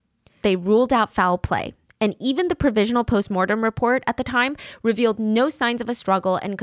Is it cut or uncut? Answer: uncut